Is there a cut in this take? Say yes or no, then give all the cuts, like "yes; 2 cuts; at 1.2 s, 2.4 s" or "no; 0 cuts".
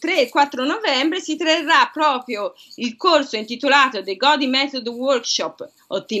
no; 0 cuts